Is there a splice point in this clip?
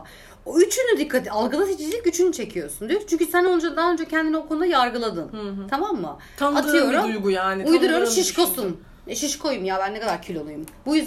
no; 0 cuts

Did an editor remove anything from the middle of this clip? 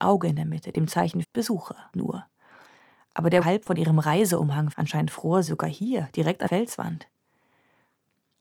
yes; 6 cuts; at 1.2 s, 1.9 s, 3.4 s, 4.7 s, 5.5 s, 6.5 s

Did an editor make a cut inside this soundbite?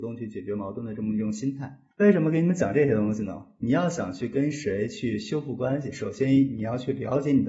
yes; 1 cut; at 1.9 s

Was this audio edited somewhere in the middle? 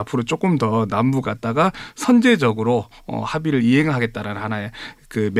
yes; 1 cut; at 1.2 s

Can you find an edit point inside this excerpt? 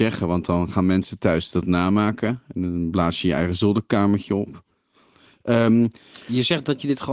no; 0 cuts

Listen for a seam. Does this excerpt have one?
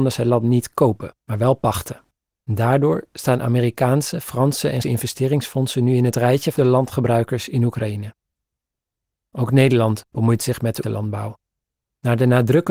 yes; 6 cuts; at 1.2 s, 2.3 s, 4.8 s, 6.6 s, 10.1 s, 10.8 s

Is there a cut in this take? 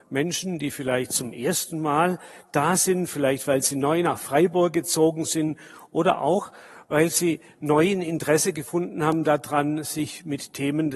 no; 0 cuts

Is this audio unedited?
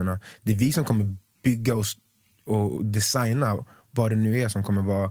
yes; 0 cuts

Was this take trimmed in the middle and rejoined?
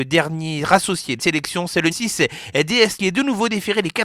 yes; 3 cuts; at 1.2 s, 1.9 s, 3.0 s

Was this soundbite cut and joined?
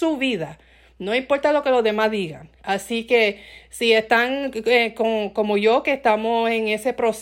yes; 1 cut; at 2.5 s

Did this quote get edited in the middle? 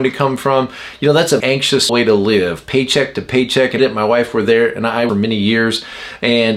yes; 4 cuts; at 1.4 s, 1.9 s, 3.8 s, 5.1 s

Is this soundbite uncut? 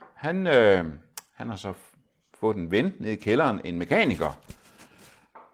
yes; 0 cuts

